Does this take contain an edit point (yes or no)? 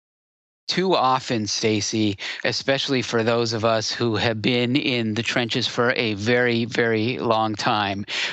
no